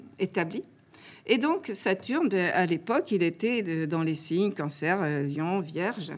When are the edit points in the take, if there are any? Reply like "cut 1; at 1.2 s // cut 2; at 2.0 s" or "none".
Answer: none